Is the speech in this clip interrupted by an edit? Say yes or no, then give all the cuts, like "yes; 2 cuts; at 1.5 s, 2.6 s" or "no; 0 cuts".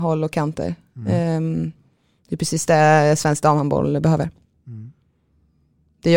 no; 0 cuts